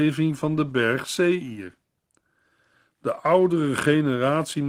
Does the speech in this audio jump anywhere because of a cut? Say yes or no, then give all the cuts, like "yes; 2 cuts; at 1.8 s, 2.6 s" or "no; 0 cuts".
no; 0 cuts